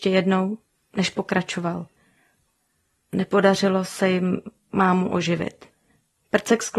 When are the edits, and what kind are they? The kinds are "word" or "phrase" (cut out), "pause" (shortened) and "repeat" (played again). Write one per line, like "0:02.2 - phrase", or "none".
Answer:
none